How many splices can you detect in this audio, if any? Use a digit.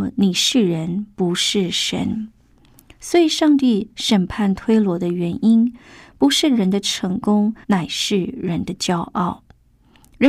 1